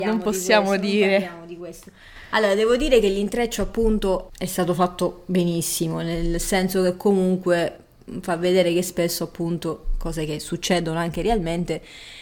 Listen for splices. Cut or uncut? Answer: uncut